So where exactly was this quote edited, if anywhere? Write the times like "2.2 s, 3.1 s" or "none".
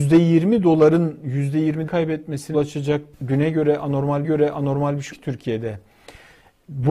1.9 s, 2.5 s, 3.1 s, 4.2 s, 5.1 s